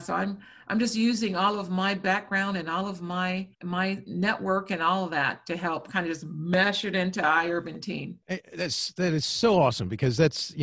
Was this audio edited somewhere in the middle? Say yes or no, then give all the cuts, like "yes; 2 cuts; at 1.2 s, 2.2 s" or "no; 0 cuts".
yes; 2 cuts; at 3.5 s, 8.2 s